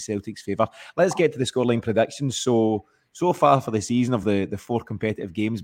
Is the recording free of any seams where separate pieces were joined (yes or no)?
yes